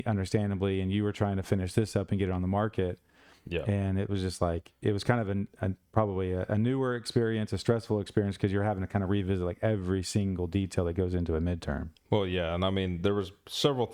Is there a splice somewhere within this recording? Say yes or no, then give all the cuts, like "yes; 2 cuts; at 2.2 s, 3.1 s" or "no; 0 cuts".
no; 0 cuts